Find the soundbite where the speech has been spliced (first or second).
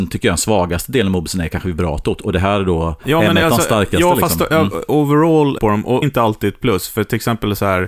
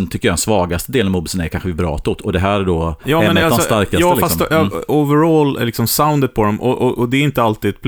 first